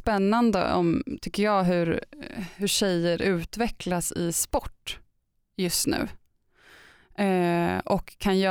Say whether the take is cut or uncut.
uncut